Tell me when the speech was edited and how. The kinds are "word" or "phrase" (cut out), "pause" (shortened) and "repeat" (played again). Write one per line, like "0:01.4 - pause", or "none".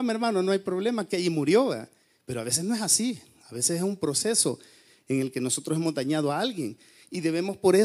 none